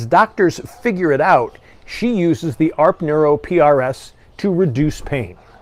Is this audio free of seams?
yes; 0 cuts

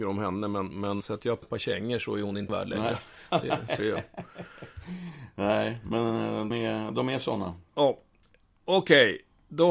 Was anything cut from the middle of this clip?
yes; 5 cuts; at 1.0 s, 1.4 s, 2.5 s, 3.8 s, 6.5 s

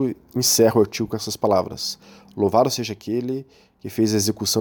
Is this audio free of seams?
yes; 0 cuts

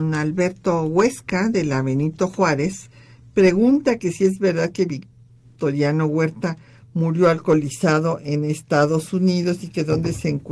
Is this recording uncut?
yes; 0 cuts

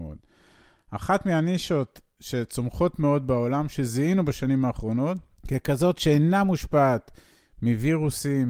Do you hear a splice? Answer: no; 0 cuts

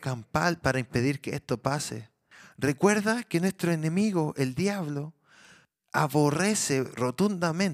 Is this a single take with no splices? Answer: yes; 0 cuts

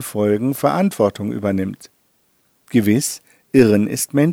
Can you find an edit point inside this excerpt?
no; 0 cuts

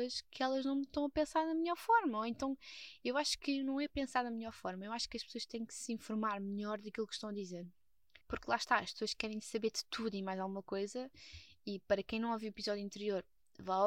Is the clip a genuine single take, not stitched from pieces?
no; 1 cut; at 8.2 s

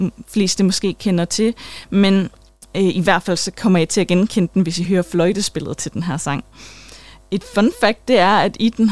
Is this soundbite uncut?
yes; 0 cuts

